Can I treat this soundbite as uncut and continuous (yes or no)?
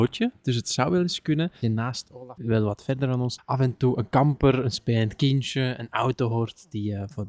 no